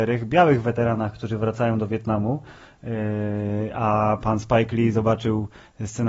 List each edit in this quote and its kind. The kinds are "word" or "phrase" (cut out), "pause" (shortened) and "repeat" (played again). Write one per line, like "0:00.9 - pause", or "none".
none